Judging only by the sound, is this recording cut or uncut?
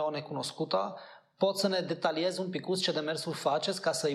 uncut